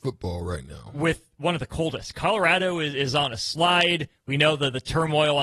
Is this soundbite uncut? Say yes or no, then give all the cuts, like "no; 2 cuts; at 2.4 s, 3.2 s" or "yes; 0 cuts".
yes; 0 cuts